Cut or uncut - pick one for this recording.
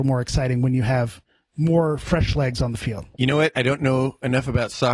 uncut